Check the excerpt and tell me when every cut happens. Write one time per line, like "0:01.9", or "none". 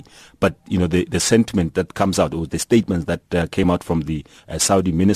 none